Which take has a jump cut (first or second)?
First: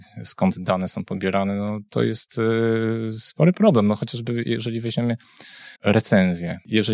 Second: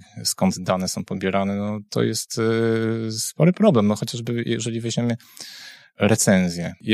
first